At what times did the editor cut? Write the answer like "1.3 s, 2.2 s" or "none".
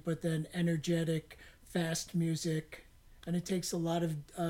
none